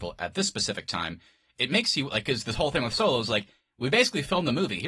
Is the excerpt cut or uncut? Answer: uncut